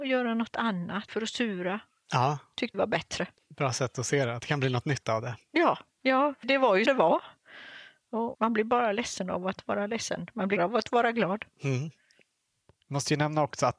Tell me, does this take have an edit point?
yes; 5 cuts; at 1.1 s, 2.7 s, 6.4 s, 6.9 s, 10.6 s

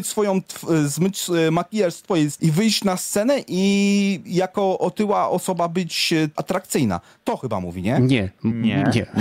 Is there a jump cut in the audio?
yes; 2 cuts; at 2.4 s, 6.4 s

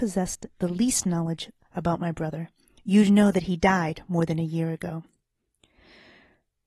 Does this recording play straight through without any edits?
yes; 0 cuts

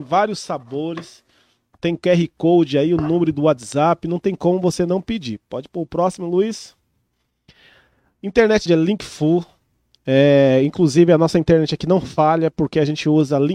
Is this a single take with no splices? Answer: no; 1 cut; at 8.7 s

